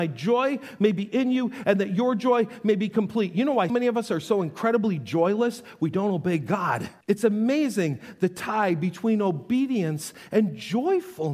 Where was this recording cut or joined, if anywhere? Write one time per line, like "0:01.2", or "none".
0:03.7
0:07.0